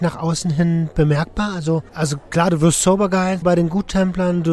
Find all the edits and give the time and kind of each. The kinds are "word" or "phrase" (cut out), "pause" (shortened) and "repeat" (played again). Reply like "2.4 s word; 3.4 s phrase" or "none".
1.9 s pause; 3.4 s word